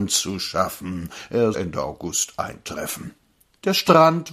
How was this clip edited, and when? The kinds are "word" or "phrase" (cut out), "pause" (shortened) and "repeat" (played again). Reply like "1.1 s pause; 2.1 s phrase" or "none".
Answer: 1.5 s word